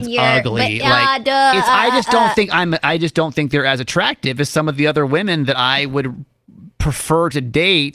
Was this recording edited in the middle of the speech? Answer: yes; 1 cut; at 2.8 s

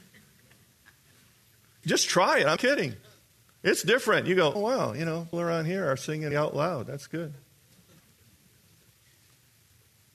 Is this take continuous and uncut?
no; 6 cuts; at 1.8 s, 2.6 s, 4.5 s, 5.3 s, 6.3 s, 8.0 s

